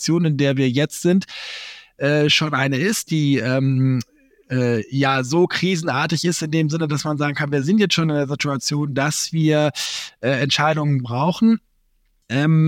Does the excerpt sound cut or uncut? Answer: uncut